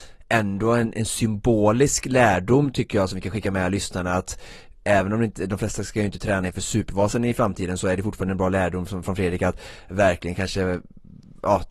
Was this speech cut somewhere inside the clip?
no; 0 cuts

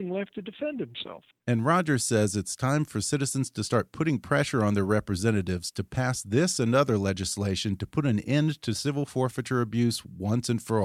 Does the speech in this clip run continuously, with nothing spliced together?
no; 1 cut; at 1.3 s

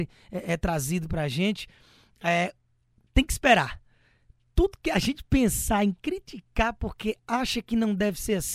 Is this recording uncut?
yes; 0 cuts

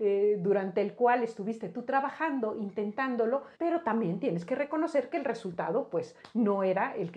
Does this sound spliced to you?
yes; 1 cut; at 3.6 s

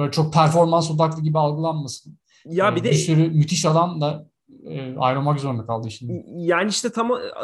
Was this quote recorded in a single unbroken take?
yes; 0 cuts

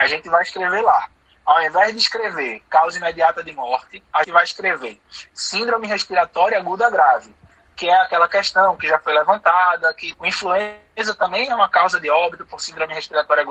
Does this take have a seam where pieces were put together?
yes; 2 cuts; at 4.2 s, 10.1 s

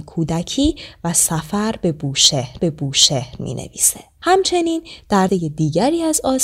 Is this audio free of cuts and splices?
no; 2 cuts; at 2.6 s, 5.3 s

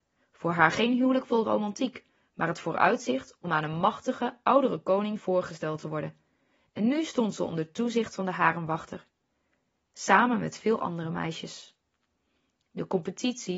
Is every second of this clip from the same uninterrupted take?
yes; 0 cuts

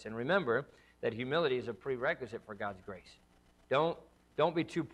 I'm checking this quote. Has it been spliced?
no; 0 cuts

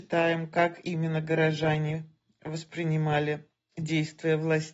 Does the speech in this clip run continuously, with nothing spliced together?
yes; 0 cuts

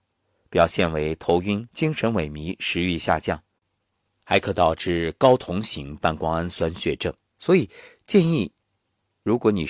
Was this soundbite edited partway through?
yes; 2 cuts; at 1.7 s, 7.3 s

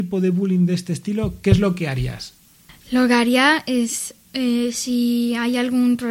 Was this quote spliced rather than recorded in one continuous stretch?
no; 0 cuts

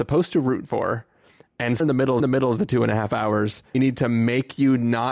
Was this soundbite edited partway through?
yes; 3 cuts; at 1.8 s, 2.2 s, 3.7 s

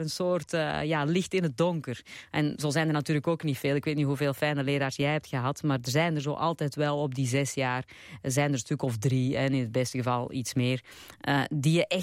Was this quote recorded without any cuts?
yes; 0 cuts

